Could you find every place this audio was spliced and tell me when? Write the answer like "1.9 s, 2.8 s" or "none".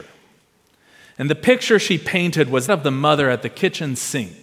2.7 s